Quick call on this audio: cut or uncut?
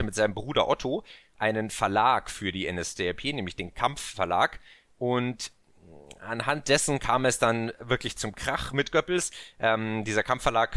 uncut